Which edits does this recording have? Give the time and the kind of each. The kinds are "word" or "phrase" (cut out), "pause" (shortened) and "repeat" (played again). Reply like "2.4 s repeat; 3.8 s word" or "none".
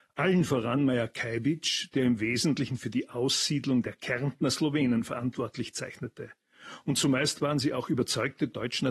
none